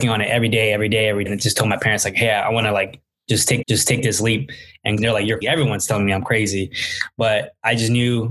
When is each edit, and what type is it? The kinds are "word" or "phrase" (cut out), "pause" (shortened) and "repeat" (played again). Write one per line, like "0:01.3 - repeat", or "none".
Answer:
0:01.3 - word
0:03.6 - repeat
0:05.0 - phrase
0:05.4 - word